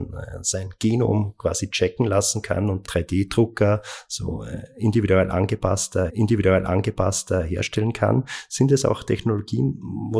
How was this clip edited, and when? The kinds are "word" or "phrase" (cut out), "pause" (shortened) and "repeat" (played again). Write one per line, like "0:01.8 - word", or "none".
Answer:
0:02.8 - phrase
0:06.1 - repeat